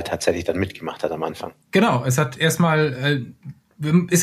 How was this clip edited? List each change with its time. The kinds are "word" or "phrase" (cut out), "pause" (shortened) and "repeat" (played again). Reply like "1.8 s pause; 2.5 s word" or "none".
1.6 s pause